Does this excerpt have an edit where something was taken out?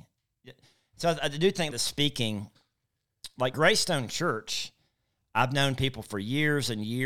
yes; 2 cuts; at 1.7 s, 3.5 s

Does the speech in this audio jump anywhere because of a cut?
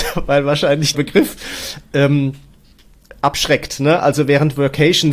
yes; 1 cut; at 0.9 s

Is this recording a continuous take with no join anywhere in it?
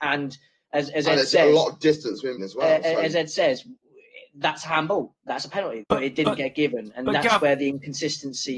no; 2 cuts; at 2.4 s, 5.8 s

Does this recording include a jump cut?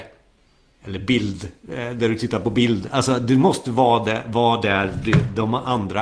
no; 0 cuts

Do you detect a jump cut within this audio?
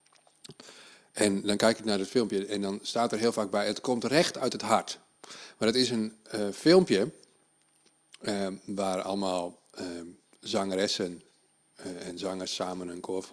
no; 0 cuts

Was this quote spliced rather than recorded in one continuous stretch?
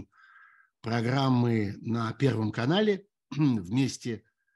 no; 0 cuts

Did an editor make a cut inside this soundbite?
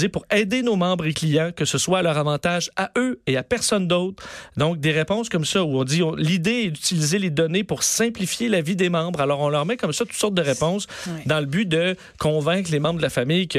no; 0 cuts

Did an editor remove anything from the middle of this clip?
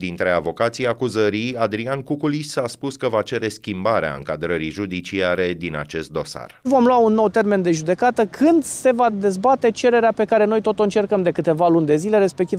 no; 0 cuts

